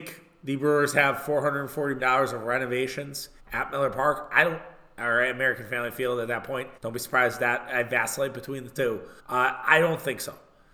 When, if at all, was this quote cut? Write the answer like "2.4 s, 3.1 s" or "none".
2.0 s, 3.4 s, 6.8 s, 9.2 s